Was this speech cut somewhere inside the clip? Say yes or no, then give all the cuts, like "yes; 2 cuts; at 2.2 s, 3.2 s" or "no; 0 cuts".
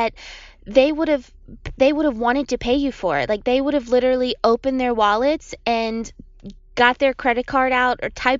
no; 0 cuts